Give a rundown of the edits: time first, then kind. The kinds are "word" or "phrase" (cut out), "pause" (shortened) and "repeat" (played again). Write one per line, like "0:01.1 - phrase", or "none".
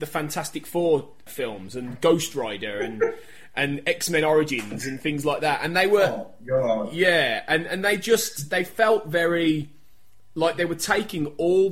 none